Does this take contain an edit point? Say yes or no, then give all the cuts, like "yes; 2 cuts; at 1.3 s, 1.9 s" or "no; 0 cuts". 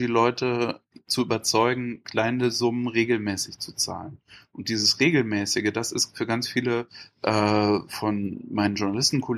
no; 0 cuts